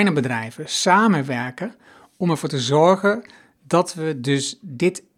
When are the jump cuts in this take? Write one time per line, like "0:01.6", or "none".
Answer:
none